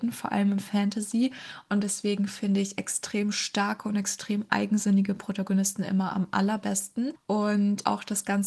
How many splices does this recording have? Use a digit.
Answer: 0